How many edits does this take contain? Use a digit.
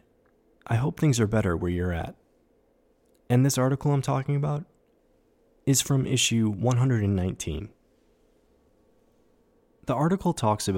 0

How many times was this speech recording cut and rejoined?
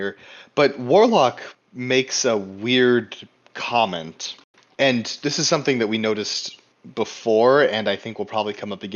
0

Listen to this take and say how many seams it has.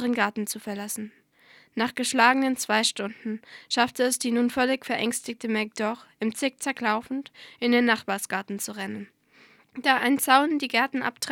0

